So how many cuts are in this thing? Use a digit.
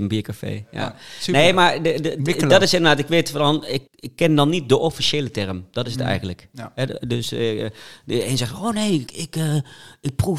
2